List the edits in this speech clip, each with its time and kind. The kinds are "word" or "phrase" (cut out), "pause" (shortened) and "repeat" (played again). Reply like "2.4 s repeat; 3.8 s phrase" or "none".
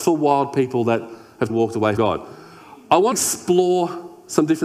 1.5 s word; 2.0 s word; 3.1 s word